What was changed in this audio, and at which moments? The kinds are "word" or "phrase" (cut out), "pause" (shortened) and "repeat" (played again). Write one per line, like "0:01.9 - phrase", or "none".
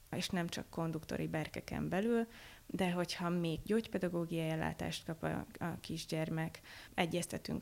0:03.7 - word